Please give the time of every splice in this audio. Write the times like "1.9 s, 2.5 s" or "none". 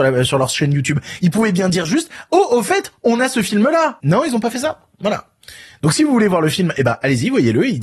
none